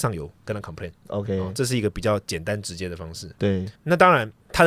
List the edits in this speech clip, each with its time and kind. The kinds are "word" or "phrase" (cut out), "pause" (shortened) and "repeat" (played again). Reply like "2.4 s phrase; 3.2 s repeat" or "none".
3.7 s pause

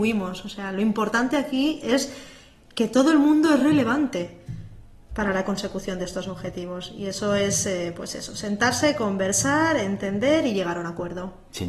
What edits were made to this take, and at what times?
none

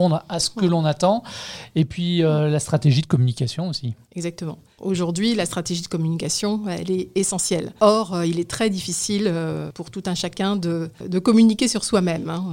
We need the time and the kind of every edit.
none

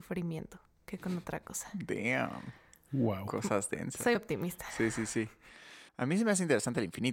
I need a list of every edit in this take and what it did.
4.2 s word; 5.9 s pause

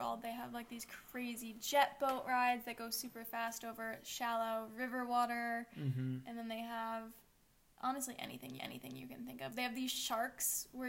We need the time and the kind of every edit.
8.6 s repeat

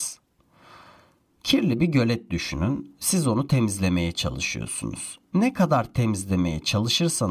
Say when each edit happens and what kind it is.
5.2 s pause

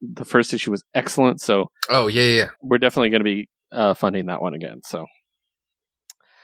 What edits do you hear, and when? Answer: 2.6 s pause

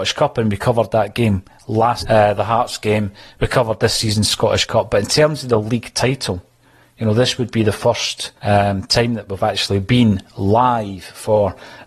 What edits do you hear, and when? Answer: 2.0 s word; 8.4 s pause

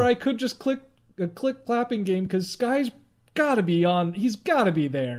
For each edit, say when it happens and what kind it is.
none

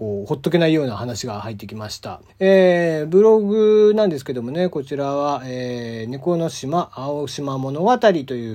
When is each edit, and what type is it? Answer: 2.3 s pause

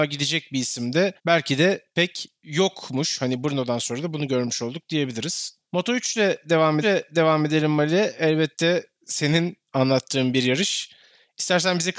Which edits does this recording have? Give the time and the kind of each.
1.2 s pause; 5.6 s pause; 6.8 s repeat

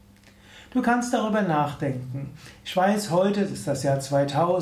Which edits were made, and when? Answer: none

